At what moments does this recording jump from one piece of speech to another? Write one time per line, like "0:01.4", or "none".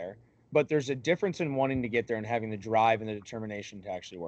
none

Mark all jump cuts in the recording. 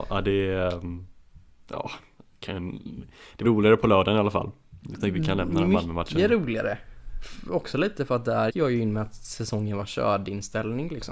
0:03.4
0:08.5

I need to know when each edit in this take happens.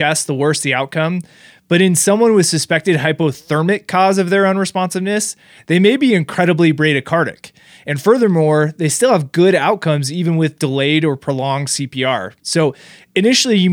none

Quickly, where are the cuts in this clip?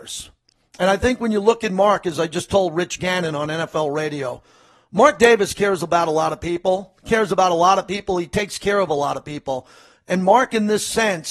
none

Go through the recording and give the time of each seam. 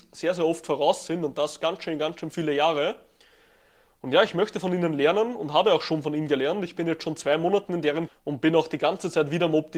0:08.1

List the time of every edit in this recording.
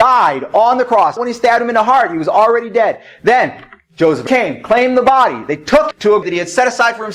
0:01.2
0:04.3
0:05.9
0:06.2

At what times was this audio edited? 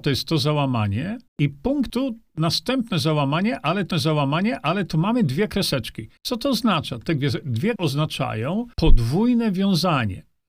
0:01.3
0:01.9
0:03.9
0:06.2
0:07.8
0:08.7

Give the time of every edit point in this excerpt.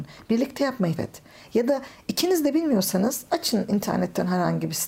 0:01.0

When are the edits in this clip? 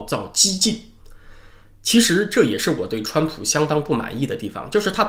none

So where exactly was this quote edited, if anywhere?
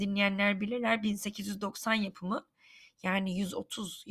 none

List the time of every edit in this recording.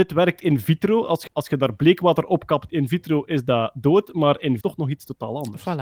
0:01.3
0:02.7
0:04.6

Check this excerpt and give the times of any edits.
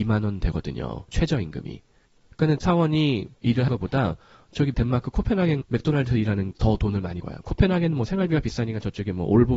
0:02.6
0:03.3
0:03.7
0:04.7
0:05.6
0:06.5
0:07.2

